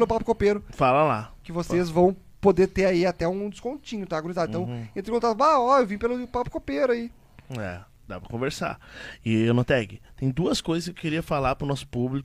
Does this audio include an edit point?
no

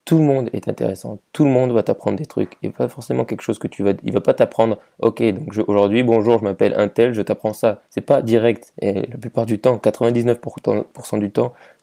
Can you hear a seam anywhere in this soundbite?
yes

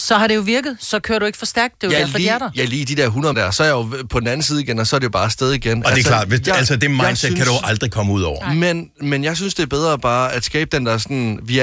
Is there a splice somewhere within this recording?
yes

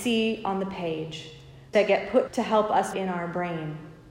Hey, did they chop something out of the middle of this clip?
yes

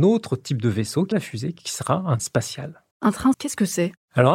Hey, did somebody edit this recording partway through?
yes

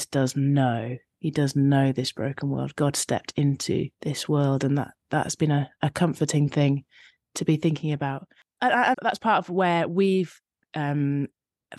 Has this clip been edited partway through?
yes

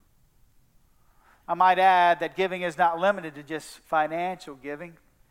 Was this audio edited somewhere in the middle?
no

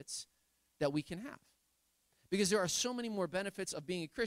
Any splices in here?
no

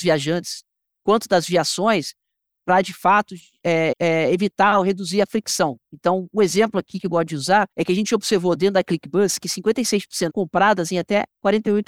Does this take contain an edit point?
yes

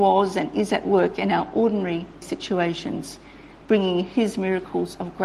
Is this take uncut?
no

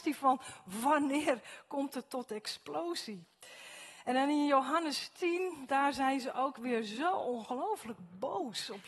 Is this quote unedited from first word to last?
yes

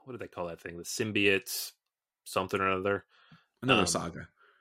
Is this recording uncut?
yes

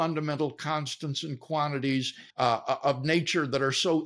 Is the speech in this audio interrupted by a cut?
yes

